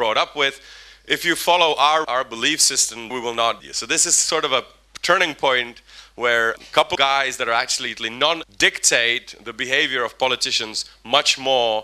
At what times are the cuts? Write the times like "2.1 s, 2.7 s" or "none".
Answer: 2.0 s, 3.1 s, 3.6 s, 6.6 s, 7.0 s, 8.4 s